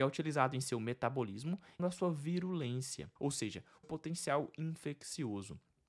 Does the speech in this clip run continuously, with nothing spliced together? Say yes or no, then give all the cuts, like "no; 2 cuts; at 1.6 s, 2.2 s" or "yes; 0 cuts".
no; 3 cuts; at 1.8 s, 3.2 s, 3.8 s